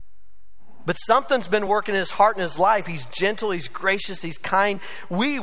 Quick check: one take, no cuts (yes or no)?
yes